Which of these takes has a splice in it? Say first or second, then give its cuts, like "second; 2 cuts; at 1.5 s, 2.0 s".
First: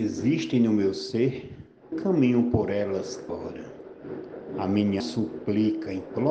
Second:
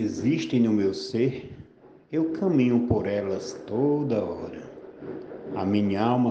first; 3 cuts; at 1.9 s, 3.3 s, 5.0 s